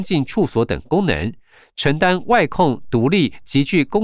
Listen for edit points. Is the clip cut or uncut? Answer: uncut